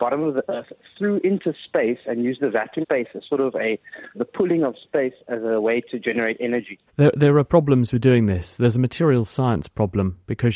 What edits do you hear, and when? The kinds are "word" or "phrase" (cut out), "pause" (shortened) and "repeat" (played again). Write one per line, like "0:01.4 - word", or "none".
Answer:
0:02.8 - word
0:04.1 - word
0:06.9 - pause